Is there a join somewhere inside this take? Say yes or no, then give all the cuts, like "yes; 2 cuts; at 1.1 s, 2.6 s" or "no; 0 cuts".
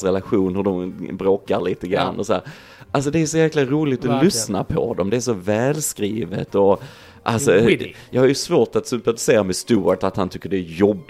no; 0 cuts